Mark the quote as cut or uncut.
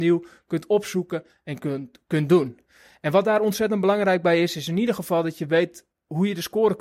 uncut